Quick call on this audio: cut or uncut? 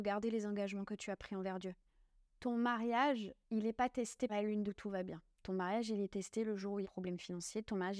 cut